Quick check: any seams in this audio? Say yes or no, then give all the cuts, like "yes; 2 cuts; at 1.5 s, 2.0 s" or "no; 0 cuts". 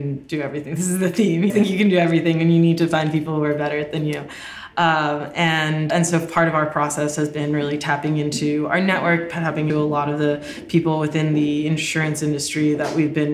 yes; 3 cuts; at 1.5 s, 5.9 s, 9.7 s